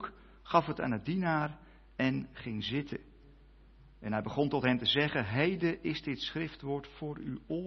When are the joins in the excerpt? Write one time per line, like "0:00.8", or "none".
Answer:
none